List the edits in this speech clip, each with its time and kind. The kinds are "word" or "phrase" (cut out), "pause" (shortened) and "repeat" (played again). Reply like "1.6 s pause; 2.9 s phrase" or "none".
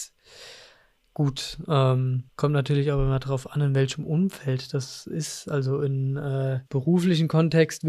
2.3 s pause; 6.7 s pause